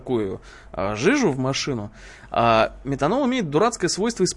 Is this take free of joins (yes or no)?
yes